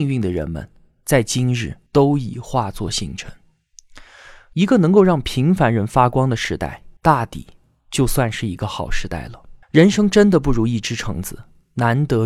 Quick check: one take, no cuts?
no; 3 cuts; at 1.9 s, 7.0 s, 9.6 s

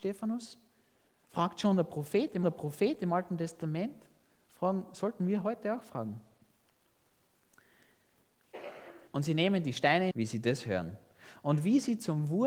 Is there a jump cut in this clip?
yes; 3 cuts; at 2.4 s, 9.1 s, 10.1 s

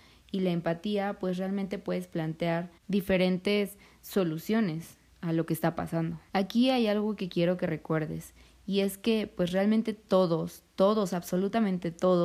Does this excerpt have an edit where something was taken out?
yes; 2 cuts; at 2.8 s, 6.3 s

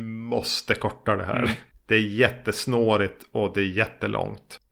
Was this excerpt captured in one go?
no; 1 cut; at 1.8 s

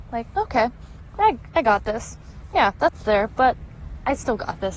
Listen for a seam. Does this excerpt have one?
no; 0 cuts

